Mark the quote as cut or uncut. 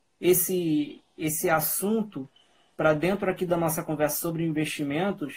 uncut